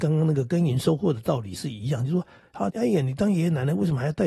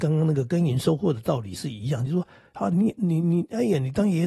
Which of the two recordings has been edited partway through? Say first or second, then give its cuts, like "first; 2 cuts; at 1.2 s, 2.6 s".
first; 1 cut; at 2.7 s